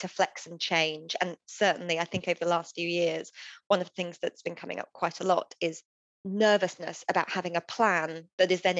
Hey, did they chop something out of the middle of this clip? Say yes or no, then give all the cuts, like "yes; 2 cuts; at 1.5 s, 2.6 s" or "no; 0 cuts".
no; 0 cuts